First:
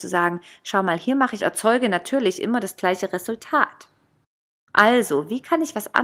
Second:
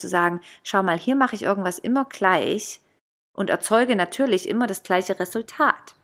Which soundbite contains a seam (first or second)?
first